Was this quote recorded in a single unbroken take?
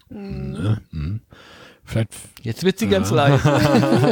yes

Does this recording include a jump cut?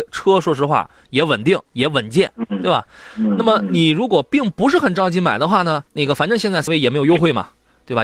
yes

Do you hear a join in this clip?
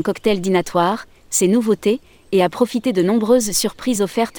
no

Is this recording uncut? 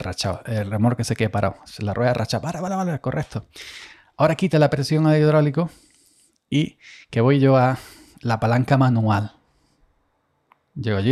yes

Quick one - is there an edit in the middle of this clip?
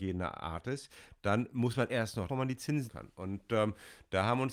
yes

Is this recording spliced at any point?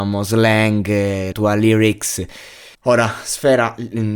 yes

